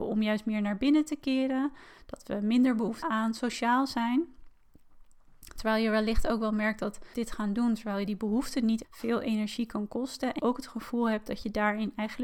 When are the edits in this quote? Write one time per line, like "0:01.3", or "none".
0:03.0
0:07.1
0:08.8
0:10.4